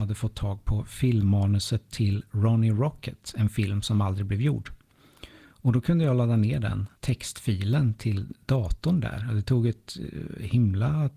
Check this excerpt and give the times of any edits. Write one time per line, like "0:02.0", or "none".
0:07.0